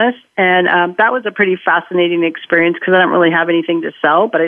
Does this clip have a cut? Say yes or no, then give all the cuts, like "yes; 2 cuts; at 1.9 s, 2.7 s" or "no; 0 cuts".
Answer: no; 0 cuts